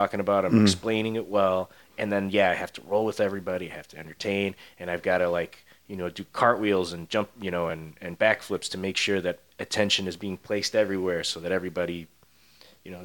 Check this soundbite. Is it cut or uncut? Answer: uncut